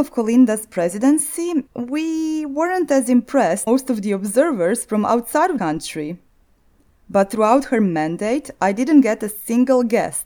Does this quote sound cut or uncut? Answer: cut